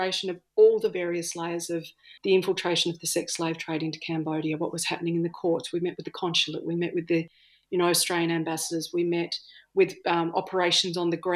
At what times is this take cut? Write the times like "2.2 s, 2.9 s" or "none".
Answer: 2.2 s